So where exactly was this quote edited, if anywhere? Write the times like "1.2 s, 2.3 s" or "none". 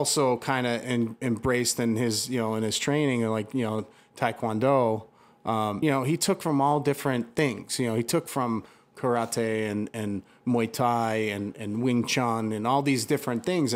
5.8 s